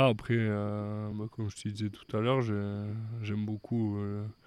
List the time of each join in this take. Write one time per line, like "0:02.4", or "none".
none